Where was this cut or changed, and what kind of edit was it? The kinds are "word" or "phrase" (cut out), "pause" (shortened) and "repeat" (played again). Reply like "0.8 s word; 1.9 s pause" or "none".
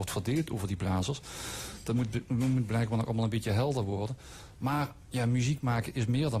none